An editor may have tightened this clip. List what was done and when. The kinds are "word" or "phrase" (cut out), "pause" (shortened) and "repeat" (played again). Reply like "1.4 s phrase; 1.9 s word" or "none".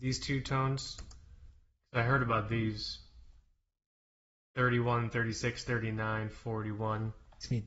none